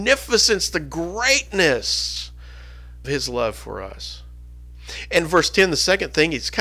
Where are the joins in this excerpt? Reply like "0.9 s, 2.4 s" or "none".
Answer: 3.0 s